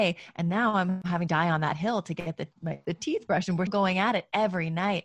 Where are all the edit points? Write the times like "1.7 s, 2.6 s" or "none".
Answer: 1.3 s, 3.7 s